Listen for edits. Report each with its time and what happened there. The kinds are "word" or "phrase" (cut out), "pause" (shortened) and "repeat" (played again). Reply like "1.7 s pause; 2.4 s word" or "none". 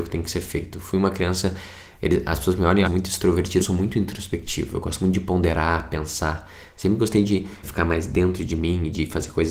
2.8 s phrase; 3.6 s phrase; 7.6 s word